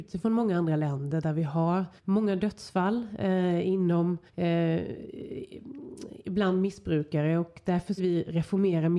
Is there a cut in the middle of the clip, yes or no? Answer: yes